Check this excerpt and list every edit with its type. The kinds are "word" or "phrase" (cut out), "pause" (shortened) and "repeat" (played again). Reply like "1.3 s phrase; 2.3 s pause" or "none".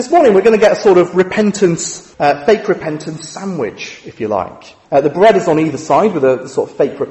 2.1 s pause; 4.8 s pause